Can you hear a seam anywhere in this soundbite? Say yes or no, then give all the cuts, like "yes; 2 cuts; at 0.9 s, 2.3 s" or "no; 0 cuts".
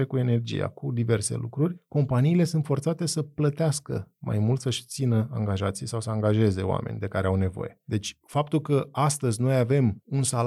no; 0 cuts